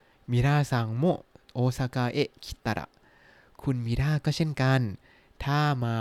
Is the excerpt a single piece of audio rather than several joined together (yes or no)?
yes